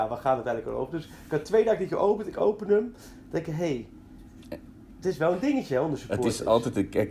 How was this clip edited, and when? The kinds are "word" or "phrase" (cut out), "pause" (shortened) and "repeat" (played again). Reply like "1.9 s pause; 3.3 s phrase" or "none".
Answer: none